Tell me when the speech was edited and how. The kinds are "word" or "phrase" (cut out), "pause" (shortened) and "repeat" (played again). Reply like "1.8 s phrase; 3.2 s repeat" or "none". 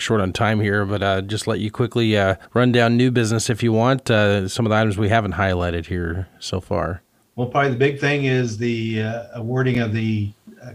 2.5 s pause; 7.2 s pause